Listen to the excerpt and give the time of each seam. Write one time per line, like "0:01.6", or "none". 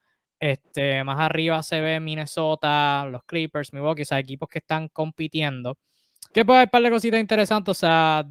0:06.3